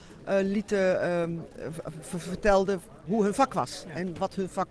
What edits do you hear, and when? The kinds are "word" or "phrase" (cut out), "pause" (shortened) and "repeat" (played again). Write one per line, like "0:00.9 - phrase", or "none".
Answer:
none